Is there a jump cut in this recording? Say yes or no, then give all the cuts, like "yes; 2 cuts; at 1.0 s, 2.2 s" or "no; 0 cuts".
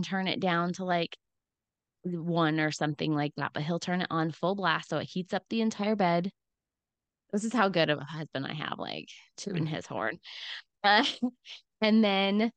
yes; 1 cut; at 9.3 s